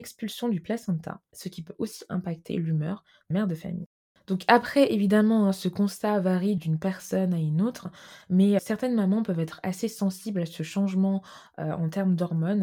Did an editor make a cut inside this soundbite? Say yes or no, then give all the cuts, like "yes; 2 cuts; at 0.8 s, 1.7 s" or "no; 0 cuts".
yes; 4 cuts; at 3.3 s, 4.1 s, 6.6 s, 8.6 s